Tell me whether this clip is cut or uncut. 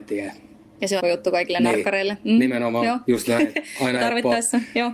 cut